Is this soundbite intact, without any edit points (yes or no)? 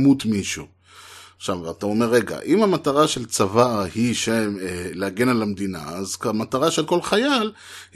yes